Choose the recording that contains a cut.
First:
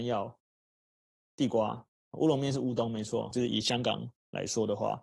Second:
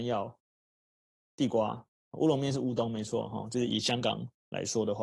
first; 1 cut; at 3.3 s

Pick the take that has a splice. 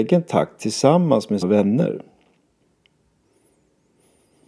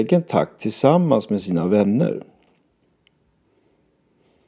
first; 1 cut; at 1.4 s

